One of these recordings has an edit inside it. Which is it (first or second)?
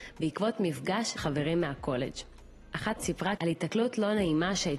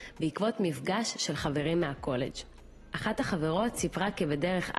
first